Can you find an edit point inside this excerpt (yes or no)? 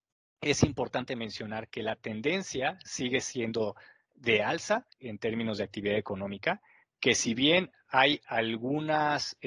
no